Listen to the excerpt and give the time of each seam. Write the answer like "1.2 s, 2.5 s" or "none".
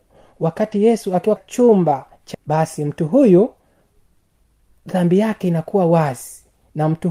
1.4 s, 2.3 s